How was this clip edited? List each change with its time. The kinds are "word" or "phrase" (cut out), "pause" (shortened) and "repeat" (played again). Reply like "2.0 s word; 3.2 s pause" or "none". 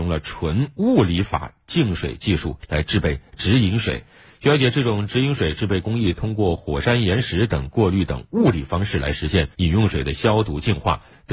9.5 s pause

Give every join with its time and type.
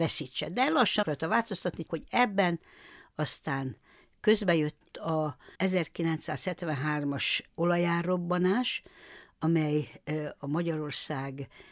1.0 s word; 1.9 s word; 5.5 s pause

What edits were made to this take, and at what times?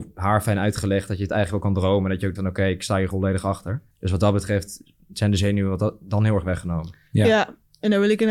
2.4 s word; 3.1 s word; 3.9 s pause

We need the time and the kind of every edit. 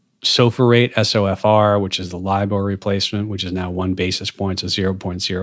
none

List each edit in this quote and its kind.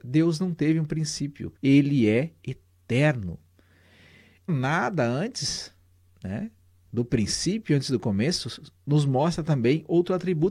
1.6 s pause; 4.5 s phrase

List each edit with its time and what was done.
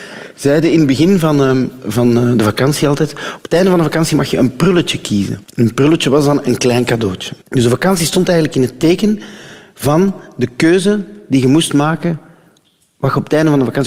5.4 s pause; 7.4 s pause

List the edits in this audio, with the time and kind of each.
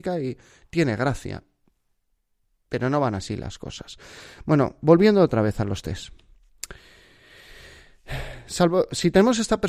none

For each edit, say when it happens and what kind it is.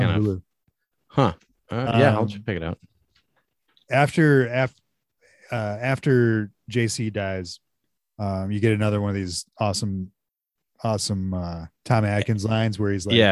11.8 s pause

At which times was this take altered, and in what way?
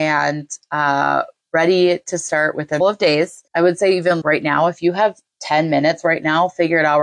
2.8 s phrase; 3.5 s pause; 4.2 s word

